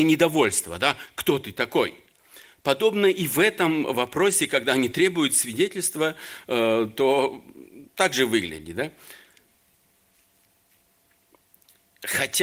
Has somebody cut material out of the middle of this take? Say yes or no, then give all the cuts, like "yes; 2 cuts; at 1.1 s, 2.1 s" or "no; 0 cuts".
no; 0 cuts